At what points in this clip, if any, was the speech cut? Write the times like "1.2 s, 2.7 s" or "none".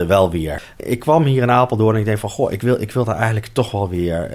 none